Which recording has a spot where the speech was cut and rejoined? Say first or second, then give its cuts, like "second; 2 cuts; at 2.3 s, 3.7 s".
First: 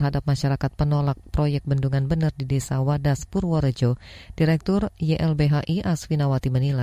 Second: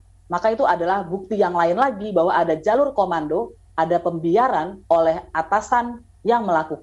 second; 1 cut; at 4.9 s